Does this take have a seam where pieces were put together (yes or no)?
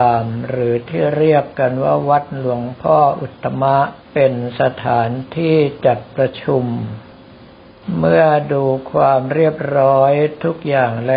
yes